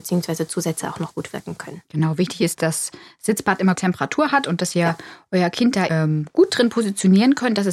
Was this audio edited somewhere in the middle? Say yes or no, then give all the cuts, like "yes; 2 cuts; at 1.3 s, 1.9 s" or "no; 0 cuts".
yes; 4 cuts; at 1.8 s, 2.5 s, 3.8 s, 5.9 s